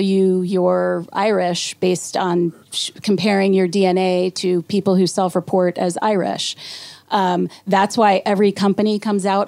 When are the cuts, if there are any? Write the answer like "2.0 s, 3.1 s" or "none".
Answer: 2.6 s